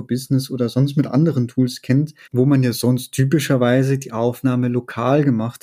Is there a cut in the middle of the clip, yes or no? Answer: yes